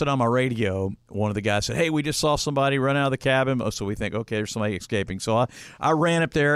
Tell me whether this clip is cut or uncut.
uncut